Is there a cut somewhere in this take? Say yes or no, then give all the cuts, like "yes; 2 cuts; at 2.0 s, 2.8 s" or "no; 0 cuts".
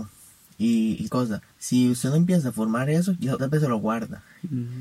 yes; 3 cuts; at 1.1 s, 1.5 s, 3.4 s